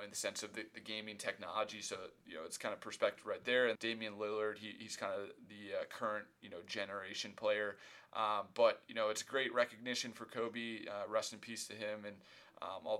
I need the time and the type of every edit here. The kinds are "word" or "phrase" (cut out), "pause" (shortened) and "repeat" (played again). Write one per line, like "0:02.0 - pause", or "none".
0:03.7 - word

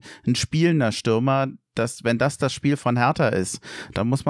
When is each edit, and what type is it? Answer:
none

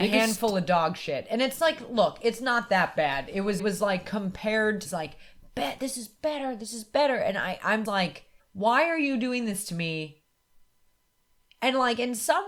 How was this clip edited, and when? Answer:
0:03.6 - phrase
0:04.8 - phrase
0:07.8 - word
0:08.4 - pause

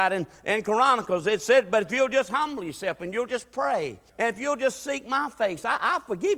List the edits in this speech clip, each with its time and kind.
0:04.1 - pause

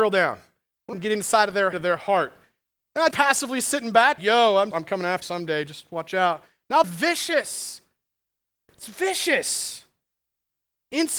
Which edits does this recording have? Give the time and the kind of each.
0:00.9 - word
0:01.7 - word
0:03.1 - word
0:04.2 - word
0:04.7 - word
0:05.2 - word
0:06.8 - word

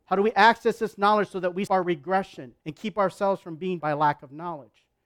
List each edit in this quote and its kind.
0:01.7 - word
0:02.6 - pause
0:03.8 - word

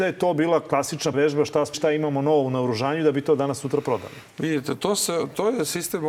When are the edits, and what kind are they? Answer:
0:01.1 - word
0:01.7 - word

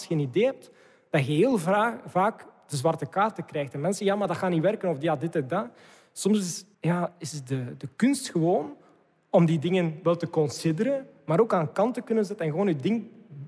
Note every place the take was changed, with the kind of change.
0:06.7 - pause

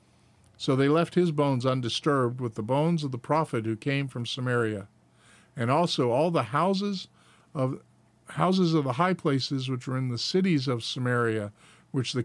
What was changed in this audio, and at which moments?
none

